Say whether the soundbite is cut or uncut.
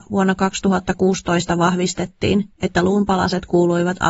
cut